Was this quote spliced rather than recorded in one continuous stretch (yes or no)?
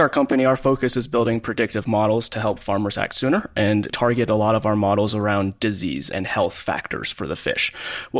yes